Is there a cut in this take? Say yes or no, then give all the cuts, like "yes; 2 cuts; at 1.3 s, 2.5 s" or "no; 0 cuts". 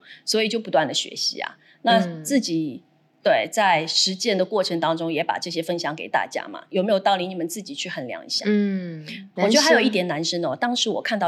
yes; 1 cut; at 9.4 s